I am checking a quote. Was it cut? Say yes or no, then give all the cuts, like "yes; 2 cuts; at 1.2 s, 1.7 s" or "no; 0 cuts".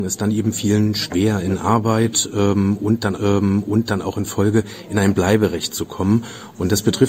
yes; 1 cut; at 3.2 s